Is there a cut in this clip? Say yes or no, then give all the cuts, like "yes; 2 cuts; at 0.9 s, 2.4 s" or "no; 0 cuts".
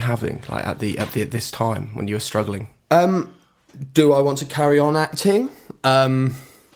no; 0 cuts